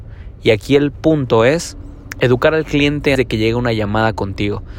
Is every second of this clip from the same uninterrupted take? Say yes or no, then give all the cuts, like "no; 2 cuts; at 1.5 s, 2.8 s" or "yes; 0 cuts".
no; 1 cut; at 3.1 s